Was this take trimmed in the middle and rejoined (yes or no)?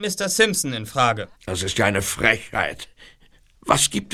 yes